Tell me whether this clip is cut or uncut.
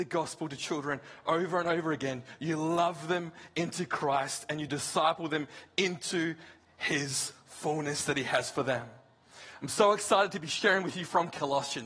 uncut